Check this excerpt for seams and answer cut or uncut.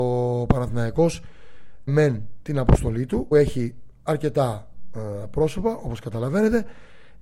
cut